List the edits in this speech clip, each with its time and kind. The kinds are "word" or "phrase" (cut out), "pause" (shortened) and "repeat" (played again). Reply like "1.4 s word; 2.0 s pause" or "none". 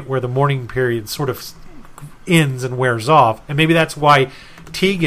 none